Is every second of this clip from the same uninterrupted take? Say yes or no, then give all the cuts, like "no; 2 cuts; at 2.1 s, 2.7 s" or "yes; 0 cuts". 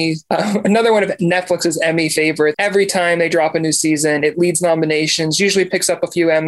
no; 1 cut; at 2.5 s